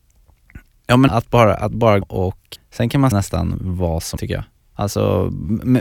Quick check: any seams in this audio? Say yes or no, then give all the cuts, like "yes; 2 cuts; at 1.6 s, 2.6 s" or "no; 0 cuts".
yes; 6 cuts; at 1.1 s, 2.0 s, 2.6 s, 3.1 s, 4.2 s, 4.6 s